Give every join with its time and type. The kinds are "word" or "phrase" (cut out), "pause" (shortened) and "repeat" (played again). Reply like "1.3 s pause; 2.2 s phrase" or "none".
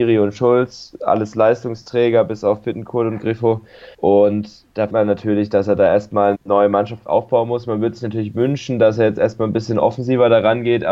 3.9 s pause; 4.9 s word; 6.3 s word